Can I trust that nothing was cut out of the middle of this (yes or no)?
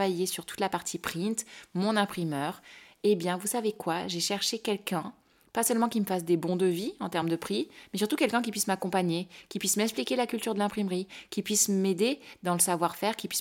yes